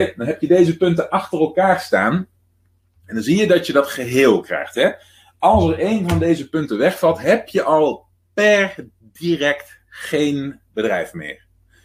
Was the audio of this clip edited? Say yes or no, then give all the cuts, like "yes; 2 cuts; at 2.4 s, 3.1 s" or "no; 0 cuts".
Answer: no; 0 cuts